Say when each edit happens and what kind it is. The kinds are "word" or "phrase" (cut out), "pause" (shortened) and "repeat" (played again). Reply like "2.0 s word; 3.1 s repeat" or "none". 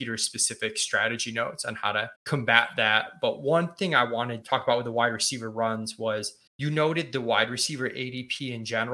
2.2 s pause; 4.4 s word; 6.5 s pause